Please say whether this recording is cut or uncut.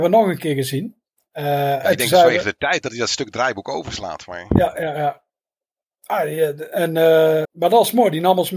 cut